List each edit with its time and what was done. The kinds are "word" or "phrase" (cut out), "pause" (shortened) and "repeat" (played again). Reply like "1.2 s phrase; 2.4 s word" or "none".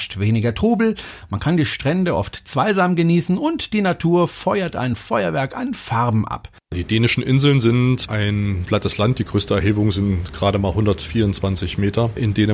none